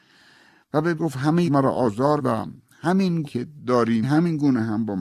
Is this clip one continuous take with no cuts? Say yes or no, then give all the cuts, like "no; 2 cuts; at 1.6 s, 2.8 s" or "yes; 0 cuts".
no; 5 cuts; at 1.0 s, 1.5 s, 2.2 s, 3.2 s, 4.0 s